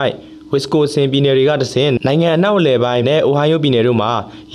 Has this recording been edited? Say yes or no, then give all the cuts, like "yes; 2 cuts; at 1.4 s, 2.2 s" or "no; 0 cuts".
yes; 1 cut; at 3.0 s